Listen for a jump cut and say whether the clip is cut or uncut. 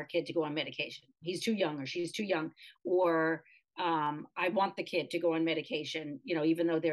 uncut